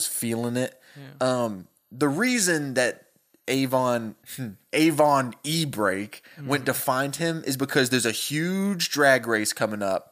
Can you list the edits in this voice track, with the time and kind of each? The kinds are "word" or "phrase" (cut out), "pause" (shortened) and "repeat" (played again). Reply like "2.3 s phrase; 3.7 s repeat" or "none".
4.2 s pause